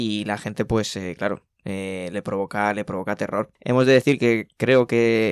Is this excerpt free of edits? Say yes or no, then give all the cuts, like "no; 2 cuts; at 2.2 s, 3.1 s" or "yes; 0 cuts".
yes; 0 cuts